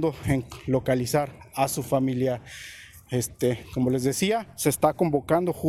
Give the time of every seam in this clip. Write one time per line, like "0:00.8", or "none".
none